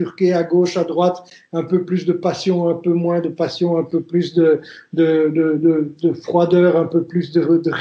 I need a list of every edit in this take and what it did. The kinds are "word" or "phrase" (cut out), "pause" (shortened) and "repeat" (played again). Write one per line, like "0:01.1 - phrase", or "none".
none